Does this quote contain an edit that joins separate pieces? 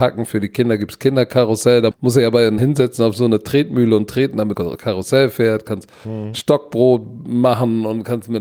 yes; 3 cuts; at 1.9 s, 2.6 s, 4.5 s

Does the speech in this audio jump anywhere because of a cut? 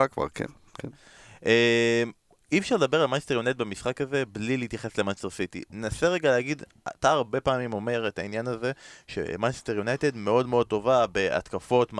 no; 0 cuts

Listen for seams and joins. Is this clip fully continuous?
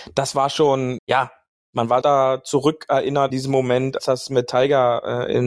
no; 4 cuts; at 1.0 s, 2.0 s, 3.3 s, 4.0 s

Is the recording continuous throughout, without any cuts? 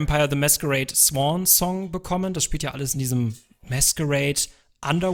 yes; 0 cuts

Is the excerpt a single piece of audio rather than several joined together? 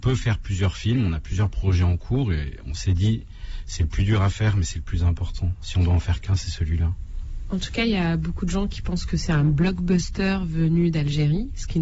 yes; 0 cuts

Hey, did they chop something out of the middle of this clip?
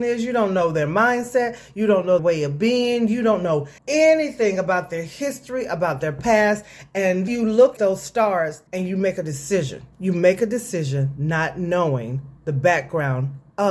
yes; 7 cuts; at 2.2 s, 3.8 s, 7.3 s, 7.8 s, 8.7 s, 9.9 s, 12.4 s

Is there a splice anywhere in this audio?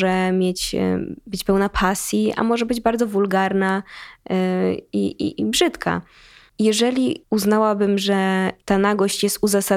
no; 0 cuts

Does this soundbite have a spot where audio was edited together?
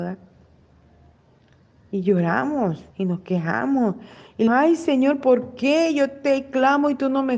yes; 3 cuts; at 2.9 s, 4.5 s, 5.2 s

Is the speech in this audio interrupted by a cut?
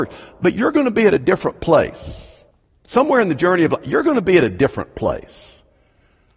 yes; 1 cut; at 2.5 s

